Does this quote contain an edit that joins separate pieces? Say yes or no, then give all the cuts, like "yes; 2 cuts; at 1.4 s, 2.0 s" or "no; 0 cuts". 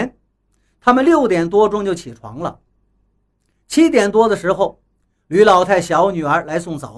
no; 0 cuts